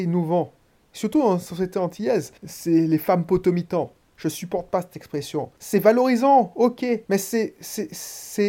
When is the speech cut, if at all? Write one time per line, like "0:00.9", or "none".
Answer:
0:02.4
0:05.6
0:07.0